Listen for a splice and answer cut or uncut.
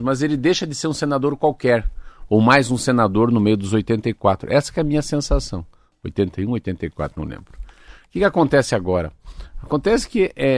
uncut